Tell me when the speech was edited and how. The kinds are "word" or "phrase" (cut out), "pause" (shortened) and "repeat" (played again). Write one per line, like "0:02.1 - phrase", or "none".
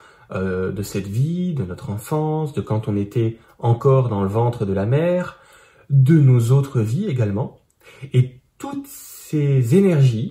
none